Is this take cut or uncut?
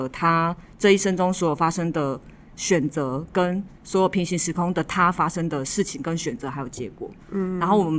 uncut